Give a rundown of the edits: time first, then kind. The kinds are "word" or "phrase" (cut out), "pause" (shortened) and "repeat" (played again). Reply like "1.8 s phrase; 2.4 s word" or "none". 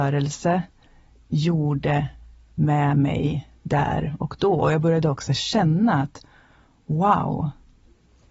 none